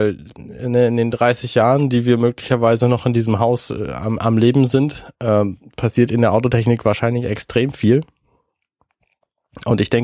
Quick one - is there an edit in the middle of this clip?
no; 0 cuts

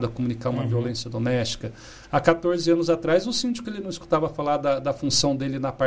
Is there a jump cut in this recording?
no; 0 cuts

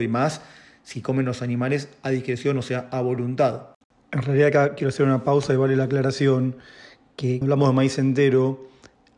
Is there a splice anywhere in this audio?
yes; 1 cut; at 7.4 s

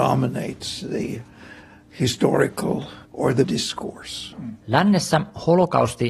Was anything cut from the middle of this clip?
yes; 2 cuts; at 3.0 s, 3.4 s

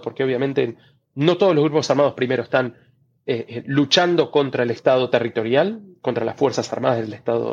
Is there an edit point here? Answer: no; 0 cuts

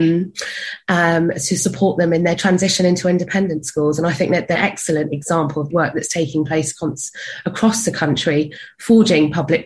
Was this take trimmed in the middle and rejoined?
yes; 2 cuts; at 4.6 s, 5.7 s

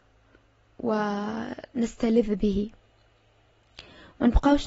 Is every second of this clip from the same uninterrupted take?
yes; 0 cuts

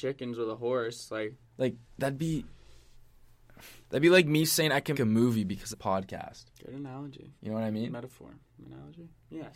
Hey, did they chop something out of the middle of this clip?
yes; 6 cuts; at 1.5 s, 3.8 s, 4.9 s, 5.7 s, 6.5 s, 7.4 s

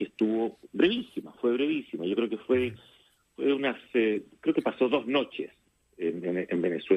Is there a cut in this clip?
no; 0 cuts

